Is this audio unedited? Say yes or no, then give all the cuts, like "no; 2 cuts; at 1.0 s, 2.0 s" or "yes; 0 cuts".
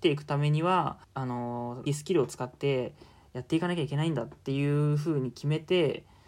no; 2 cuts; at 1.0 s, 1.9 s